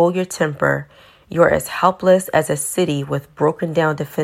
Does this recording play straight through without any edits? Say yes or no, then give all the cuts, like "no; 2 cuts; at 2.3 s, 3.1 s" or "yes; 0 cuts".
yes; 0 cuts